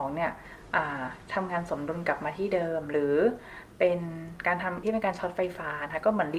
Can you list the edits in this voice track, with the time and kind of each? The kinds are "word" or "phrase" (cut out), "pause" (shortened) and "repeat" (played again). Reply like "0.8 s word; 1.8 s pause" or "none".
4.8 s word